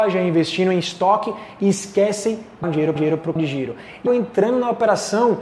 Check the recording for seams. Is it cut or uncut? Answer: cut